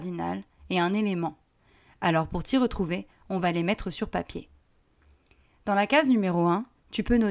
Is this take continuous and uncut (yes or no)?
yes